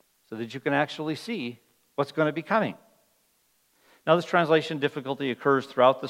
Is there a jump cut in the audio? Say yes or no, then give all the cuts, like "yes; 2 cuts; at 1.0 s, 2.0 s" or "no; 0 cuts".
no; 0 cuts